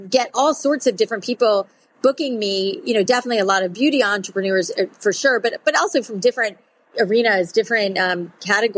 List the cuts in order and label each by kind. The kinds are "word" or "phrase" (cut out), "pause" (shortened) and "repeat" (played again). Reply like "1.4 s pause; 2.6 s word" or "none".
none